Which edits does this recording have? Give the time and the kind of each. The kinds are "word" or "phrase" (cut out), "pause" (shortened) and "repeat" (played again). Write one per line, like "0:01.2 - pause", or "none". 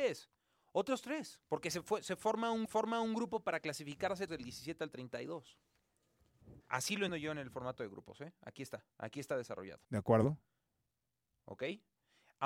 0:01.4 - pause
0:02.7 - repeat
0:04.3 - word
0:06.6 - pause
0:07.1 - word
0:08.9 - pause
0:09.8 - pause
0:11.1 - pause